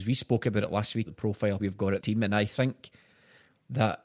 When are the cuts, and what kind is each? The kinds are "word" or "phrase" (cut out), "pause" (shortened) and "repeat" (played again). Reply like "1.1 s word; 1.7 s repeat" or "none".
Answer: 1.1 s word; 1.6 s word; 2.0 s word